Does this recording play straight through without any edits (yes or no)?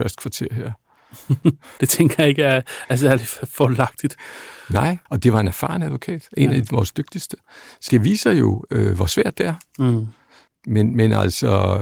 no